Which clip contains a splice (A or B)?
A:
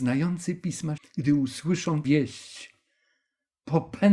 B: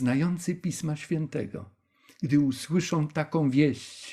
A